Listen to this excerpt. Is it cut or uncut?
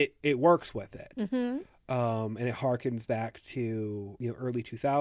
uncut